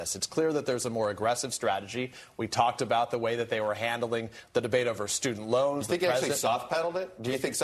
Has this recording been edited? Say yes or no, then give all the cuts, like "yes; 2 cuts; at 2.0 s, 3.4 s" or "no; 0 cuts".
no; 0 cuts